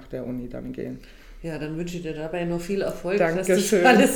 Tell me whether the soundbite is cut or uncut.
uncut